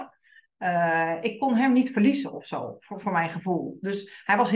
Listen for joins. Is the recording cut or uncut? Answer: uncut